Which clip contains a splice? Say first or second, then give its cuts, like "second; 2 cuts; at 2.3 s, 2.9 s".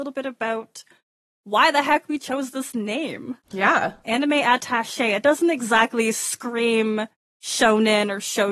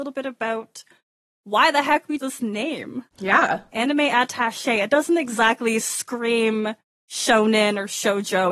second; 1 cut; at 2.2 s